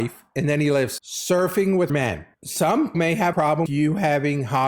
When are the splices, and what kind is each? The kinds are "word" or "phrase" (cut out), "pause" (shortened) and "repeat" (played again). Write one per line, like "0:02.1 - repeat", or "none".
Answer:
0:01.0 - word
0:01.9 - word
0:02.9 - word
0:03.3 - word
0:03.7 - word